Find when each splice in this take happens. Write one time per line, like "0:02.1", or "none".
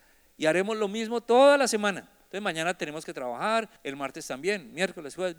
0:03.8